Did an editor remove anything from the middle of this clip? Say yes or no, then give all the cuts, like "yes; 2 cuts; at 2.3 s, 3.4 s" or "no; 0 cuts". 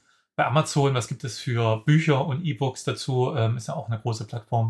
no; 0 cuts